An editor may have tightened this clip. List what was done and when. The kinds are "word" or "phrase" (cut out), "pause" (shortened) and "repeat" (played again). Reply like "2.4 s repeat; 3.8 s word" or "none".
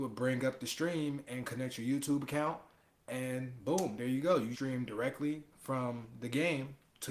4.5 s word